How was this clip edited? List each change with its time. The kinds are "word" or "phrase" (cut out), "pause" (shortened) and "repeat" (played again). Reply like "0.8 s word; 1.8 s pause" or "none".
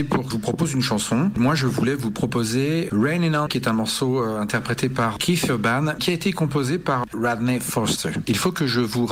2.9 s word; 3.5 s word; 6.0 s word

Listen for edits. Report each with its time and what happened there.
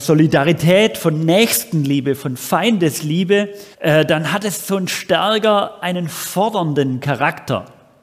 3.7 s pause

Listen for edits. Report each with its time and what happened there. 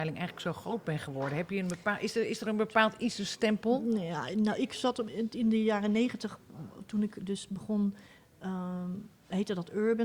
none

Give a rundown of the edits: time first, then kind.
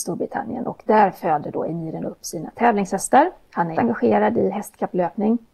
3.7 s word

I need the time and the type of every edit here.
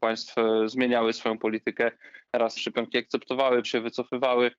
2.6 s word; 3.6 s word

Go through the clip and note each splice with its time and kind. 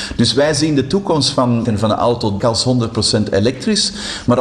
1.6 s word; 2.4 s word

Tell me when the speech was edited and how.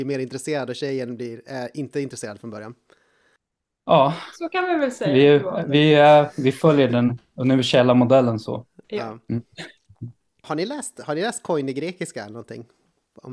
none

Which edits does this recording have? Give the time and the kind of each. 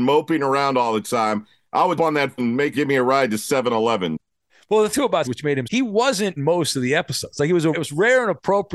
2.0 s word; 2.4 s word; 2.7 s word; 4.9 s word; 5.2 s word; 5.6 s word; 6.4 s word; 7.7 s word

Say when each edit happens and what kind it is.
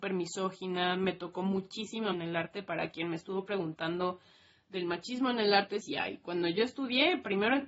2.1 s word; 5.8 s word

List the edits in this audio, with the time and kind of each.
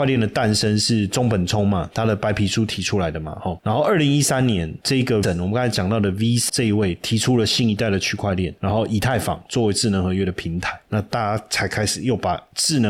5.2 s word; 6.5 s word

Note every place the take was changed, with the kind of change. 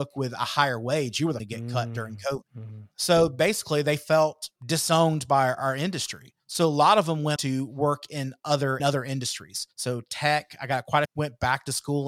1.4 s phrase; 2.5 s pause; 4.6 s pause; 6.4 s pause; 7.4 s word; 8.8 s word; 9.7 s pause; 11.0 s phrase

